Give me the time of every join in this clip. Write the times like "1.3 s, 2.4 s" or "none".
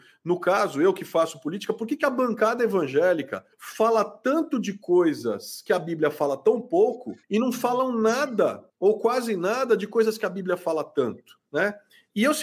3.5 s, 7.2 s, 8.7 s, 11.5 s